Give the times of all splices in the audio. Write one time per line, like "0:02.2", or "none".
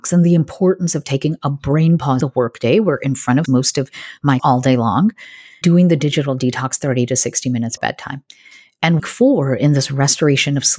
0:02.2
0:03.5
0:04.4
0:05.6
0:07.8
0:09.0